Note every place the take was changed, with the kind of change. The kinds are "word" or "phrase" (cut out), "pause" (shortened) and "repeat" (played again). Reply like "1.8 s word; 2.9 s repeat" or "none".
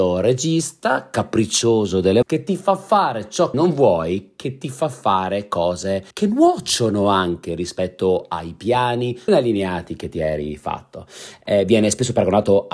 2.2 s word; 3.5 s word; 6.1 s pause; 9.3 s word